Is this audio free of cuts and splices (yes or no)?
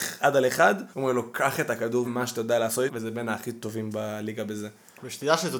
no